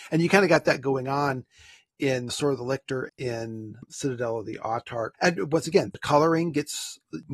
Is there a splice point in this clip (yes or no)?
yes